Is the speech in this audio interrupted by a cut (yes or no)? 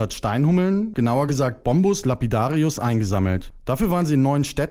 no